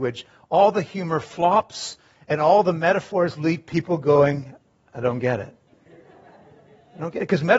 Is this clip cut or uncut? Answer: uncut